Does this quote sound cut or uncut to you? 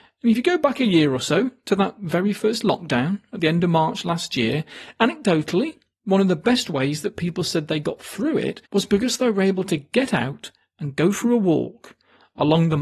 cut